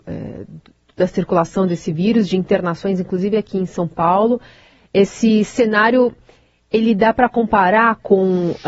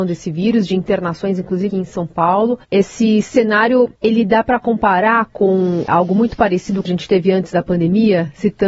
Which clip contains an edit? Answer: second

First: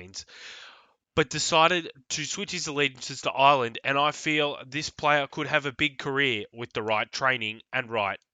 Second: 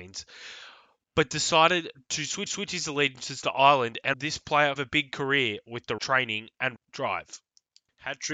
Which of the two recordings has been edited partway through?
second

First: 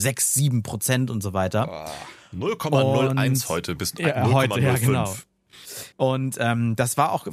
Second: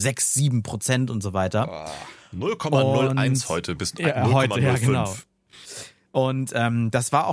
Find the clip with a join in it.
first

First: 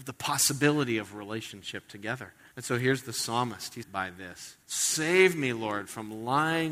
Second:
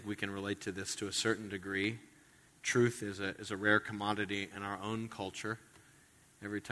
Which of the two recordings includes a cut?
first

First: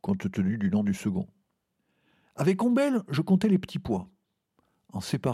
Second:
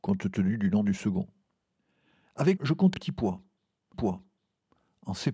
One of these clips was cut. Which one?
second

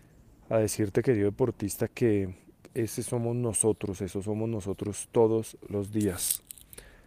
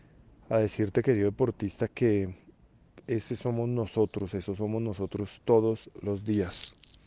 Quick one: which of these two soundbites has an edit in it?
first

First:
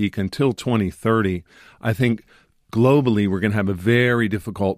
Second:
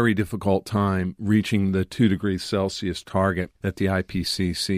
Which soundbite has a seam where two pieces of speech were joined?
second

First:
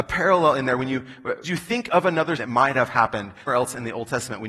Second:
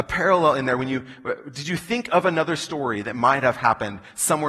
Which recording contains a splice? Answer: first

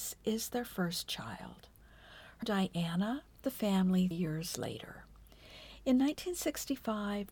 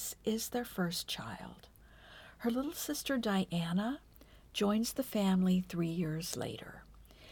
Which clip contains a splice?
first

